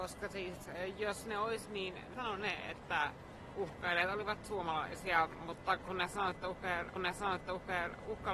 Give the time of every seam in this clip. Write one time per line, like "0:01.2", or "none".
0:02.1
0:07.0